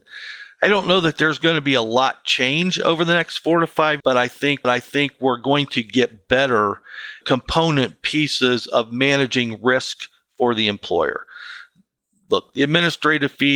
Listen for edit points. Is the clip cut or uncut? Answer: cut